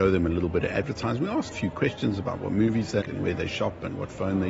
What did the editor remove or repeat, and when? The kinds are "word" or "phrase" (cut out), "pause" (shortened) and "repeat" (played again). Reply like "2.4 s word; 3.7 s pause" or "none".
1.5 s phrase; 3.0 s word